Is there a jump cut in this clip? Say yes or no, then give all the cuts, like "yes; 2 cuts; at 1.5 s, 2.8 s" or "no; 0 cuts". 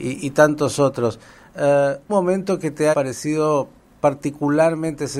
yes; 2 cuts; at 2.1 s, 2.9 s